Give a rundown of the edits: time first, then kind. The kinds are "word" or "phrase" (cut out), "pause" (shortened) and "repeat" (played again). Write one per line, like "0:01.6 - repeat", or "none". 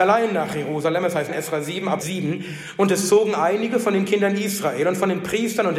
0:01.3 - word
0:02.0 - word

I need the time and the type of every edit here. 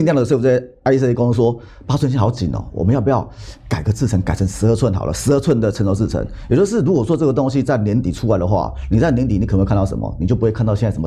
none

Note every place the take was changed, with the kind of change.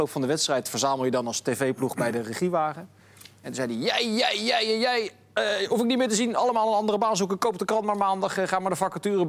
none

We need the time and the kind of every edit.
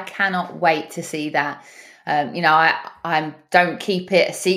none

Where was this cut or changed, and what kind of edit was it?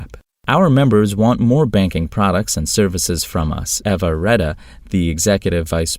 0:03.8 - word

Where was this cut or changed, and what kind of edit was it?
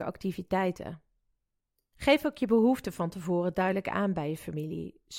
none

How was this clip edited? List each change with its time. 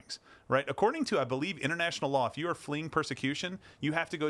none

